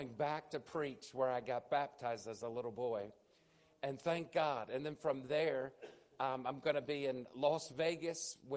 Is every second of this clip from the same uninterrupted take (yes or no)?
yes